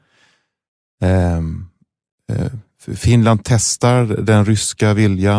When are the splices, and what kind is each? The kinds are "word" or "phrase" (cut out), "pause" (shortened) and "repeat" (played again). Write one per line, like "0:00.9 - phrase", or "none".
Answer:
none